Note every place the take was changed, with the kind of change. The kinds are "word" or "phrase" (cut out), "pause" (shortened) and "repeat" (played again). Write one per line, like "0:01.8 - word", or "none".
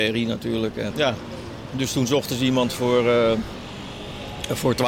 0:00.9 - word